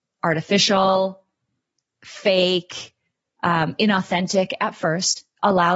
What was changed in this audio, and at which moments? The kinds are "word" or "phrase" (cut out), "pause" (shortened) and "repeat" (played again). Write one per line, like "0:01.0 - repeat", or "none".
none